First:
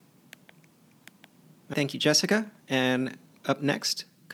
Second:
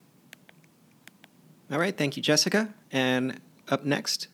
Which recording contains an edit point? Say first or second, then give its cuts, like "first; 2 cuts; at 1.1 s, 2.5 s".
first; 1 cut; at 1.7 s